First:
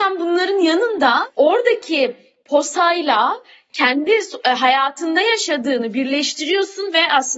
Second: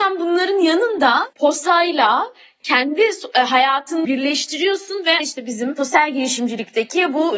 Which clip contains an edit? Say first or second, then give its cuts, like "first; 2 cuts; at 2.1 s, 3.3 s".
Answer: second; 3 cuts; at 1.3 s, 4.0 s, 5.2 s